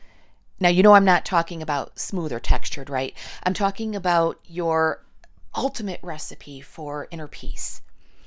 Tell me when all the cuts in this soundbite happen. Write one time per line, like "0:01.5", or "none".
none